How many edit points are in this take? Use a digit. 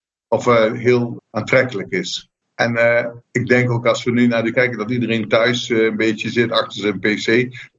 4